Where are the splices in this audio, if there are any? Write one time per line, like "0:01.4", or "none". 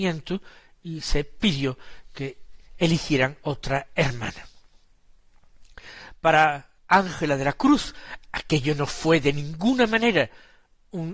0:06.8